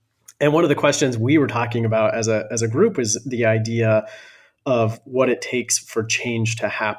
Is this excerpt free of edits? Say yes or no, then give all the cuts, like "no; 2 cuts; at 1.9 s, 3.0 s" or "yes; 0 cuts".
yes; 0 cuts